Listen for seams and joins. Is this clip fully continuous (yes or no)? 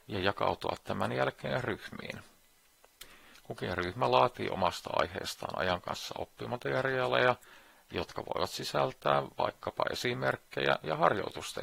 yes